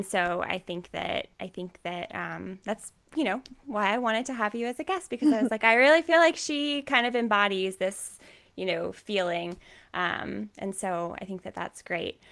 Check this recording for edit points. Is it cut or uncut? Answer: uncut